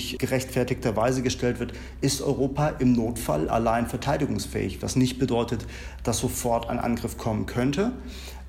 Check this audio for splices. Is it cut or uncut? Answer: uncut